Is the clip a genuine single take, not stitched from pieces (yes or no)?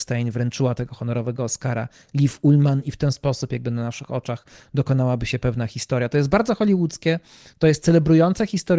yes